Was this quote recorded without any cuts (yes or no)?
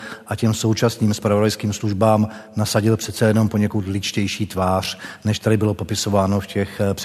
yes